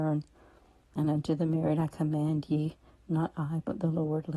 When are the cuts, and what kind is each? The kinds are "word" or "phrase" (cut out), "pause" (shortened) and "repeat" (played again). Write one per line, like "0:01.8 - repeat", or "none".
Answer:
none